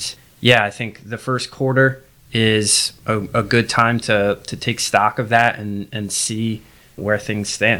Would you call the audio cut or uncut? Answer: uncut